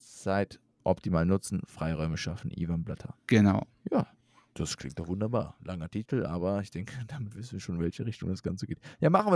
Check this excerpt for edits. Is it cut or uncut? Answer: uncut